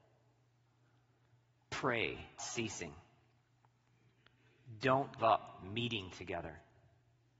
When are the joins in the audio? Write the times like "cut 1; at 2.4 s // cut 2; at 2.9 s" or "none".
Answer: cut 1; at 2.4 s // cut 2; at 5.2 s